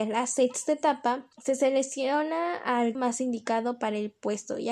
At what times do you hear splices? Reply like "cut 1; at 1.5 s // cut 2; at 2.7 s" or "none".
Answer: cut 1; at 1.3 s // cut 2; at 2.9 s